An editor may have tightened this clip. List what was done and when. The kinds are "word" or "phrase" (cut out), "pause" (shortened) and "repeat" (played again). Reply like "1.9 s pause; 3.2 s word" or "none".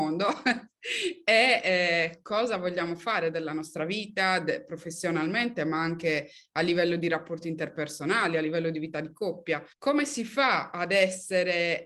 9.7 s pause